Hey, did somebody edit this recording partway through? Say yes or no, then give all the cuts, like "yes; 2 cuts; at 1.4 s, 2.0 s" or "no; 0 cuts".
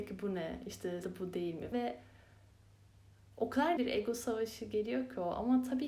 yes; 3 cuts; at 1.0 s, 1.7 s, 3.8 s